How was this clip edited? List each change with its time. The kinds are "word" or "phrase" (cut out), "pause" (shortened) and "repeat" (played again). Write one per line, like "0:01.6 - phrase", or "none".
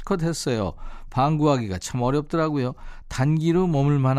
none